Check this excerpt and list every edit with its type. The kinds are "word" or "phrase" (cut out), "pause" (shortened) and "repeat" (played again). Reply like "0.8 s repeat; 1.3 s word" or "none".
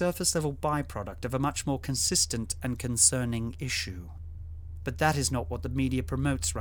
none